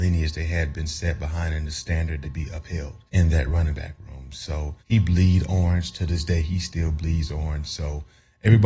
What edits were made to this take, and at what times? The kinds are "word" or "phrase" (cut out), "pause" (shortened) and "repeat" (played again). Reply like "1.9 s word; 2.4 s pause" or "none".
2.2 s phrase; 3.1 s pause; 4.8 s pause